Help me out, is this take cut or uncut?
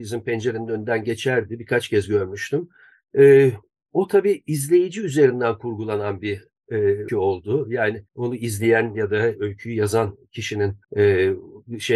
cut